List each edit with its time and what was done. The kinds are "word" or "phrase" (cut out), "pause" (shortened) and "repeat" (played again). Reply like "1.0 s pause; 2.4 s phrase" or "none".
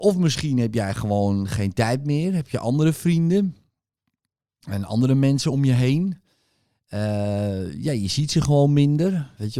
none

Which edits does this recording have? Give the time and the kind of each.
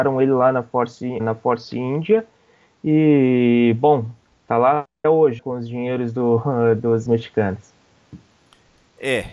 1.2 s word; 5.0 s word; 5.4 s word; 7.1 s word

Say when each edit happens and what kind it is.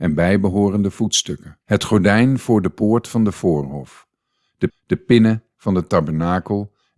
1.6 s pause; 4.7 s repeat

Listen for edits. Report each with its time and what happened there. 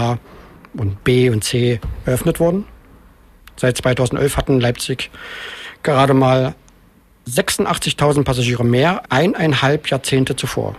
9.0 s word

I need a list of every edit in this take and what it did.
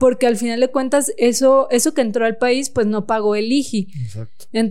none

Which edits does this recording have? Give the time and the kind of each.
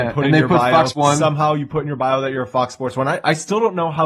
0.9 s word

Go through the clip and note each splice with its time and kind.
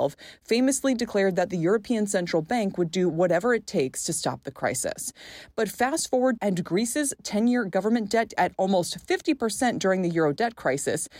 6.4 s phrase; 8.3 s phrase

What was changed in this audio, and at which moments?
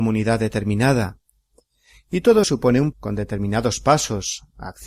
2.4 s word; 2.9 s word

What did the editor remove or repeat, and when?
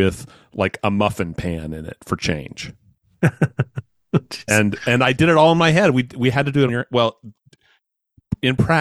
6.7 s word

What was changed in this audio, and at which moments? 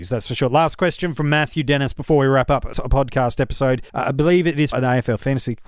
2.7 s word; 3.9 s pause; 4.7 s word

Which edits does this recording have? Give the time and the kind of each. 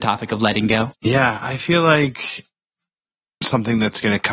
none

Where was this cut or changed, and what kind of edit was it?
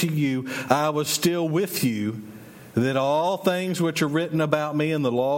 none

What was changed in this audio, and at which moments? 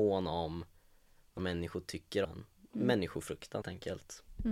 1.4 s word; 2.2 s word; 3.6 s word

